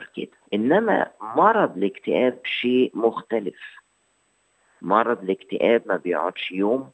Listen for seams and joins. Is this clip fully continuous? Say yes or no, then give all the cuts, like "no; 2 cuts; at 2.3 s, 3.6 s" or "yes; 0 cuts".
yes; 0 cuts